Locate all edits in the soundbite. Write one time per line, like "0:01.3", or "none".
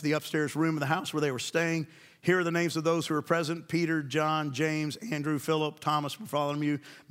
none